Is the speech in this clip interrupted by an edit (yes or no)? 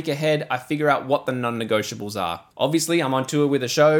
yes